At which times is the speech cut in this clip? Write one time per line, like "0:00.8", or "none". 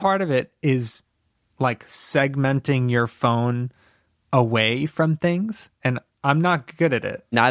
none